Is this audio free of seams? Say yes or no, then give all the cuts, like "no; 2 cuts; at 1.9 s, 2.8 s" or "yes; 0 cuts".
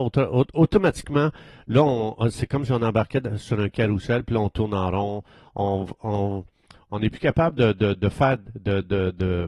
yes; 0 cuts